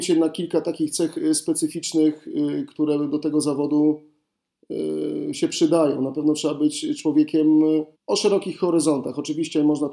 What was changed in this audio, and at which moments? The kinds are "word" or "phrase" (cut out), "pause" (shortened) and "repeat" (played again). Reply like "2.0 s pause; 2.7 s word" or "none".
7.9 s pause